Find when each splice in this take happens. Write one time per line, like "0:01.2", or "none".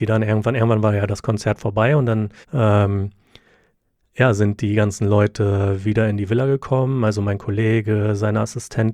0:02.4

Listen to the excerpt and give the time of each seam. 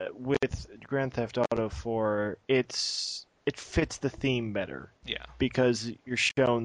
0:02.4
0:05.0

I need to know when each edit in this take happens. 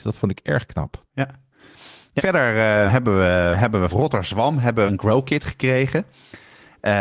0:02.2
0:02.9
0:03.5
0:03.9
0:04.9

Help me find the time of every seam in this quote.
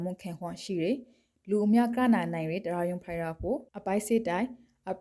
0:03.7

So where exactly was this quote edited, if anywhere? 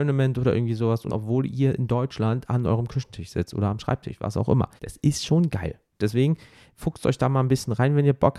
0:01.1
0:04.8

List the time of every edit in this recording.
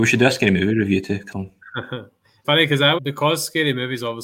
0:01.3
0:02.4
0:03.0

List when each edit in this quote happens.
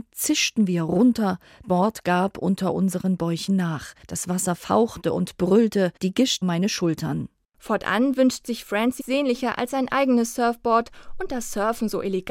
0:01.6
0:04.0
0:06.0
0:06.4
0:09.0

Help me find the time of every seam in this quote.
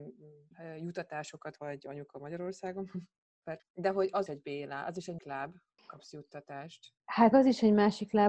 0:01.6
0:03.6
0:04.3
0:05.2
0:05.8
0:07.3

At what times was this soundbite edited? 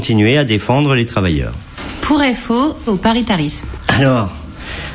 0:02.9

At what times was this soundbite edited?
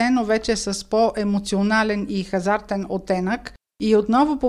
none

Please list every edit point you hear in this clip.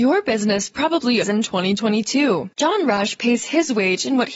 0:01.2

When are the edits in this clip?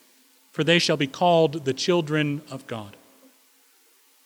none

